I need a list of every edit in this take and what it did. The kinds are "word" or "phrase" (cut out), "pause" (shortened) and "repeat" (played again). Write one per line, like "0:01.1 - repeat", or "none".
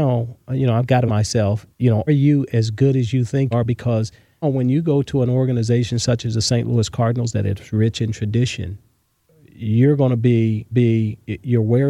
0:01.1 - word
0:01.7 - pause
0:02.1 - word
0:03.5 - word
0:04.4 - word
0:09.0 - pause
0:10.7 - repeat